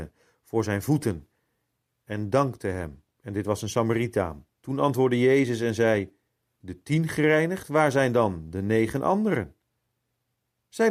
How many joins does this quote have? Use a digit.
3